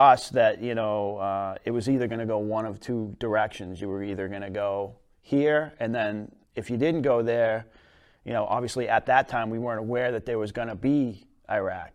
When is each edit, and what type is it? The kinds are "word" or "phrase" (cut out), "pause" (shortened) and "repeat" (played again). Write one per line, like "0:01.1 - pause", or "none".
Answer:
none